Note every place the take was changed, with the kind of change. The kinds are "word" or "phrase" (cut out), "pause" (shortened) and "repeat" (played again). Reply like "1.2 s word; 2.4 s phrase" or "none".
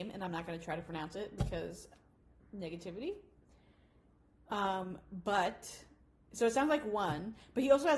none

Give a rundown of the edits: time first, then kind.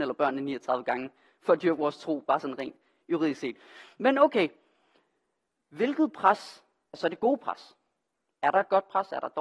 none

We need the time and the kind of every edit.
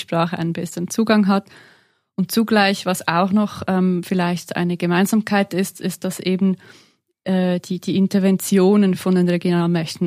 none

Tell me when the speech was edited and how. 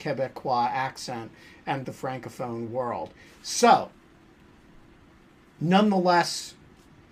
1.8 s word

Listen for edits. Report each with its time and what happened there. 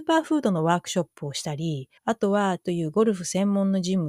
2.0 s pause; 2.6 s word

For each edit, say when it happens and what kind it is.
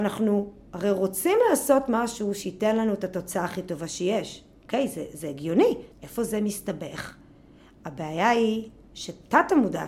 5.9 s pause

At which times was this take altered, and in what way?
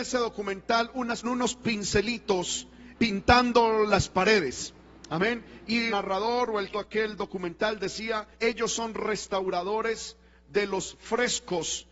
1.2 s phrase; 2.9 s phrase; 5.9 s phrase; 6.7 s phrase; 8.3 s pause

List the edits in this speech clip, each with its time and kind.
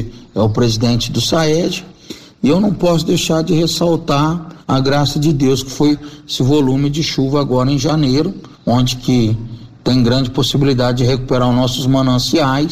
4.6 s pause; 8.5 s pause

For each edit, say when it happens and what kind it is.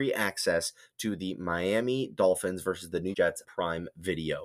3.1 s word; 3.4 s word

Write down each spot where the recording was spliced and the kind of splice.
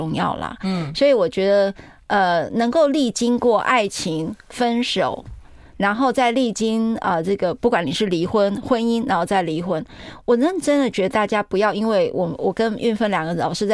none

